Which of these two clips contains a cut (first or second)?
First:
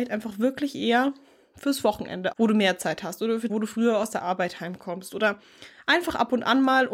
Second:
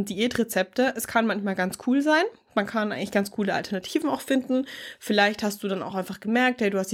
first